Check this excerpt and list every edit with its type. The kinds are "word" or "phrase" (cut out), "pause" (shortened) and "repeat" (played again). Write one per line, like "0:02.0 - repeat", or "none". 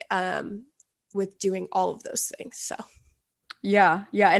none